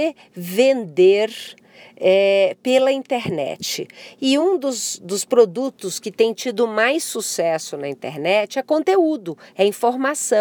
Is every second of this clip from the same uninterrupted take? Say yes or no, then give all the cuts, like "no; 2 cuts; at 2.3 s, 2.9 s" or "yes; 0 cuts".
yes; 0 cuts